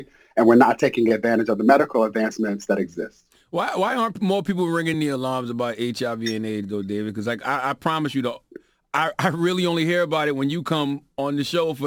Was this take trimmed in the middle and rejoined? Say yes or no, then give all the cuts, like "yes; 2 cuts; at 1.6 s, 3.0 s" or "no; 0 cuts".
no; 0 cuts